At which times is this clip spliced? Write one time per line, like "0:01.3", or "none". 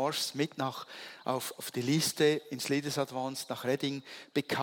0:01.6